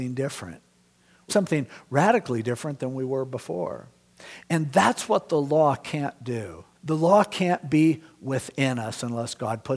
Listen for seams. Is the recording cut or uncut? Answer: cut